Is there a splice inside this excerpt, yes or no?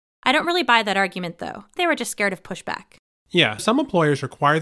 yes